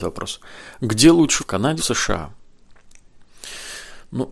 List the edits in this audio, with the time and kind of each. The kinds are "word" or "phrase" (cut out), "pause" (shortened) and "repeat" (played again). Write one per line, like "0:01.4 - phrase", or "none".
0:01.4 - word
0:01.8 - word